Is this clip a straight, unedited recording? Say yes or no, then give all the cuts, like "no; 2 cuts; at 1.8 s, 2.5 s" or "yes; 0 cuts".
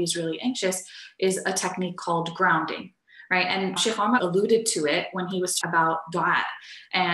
no; 3 cuts; at 3.8 s, 4.2 s, 5.6 s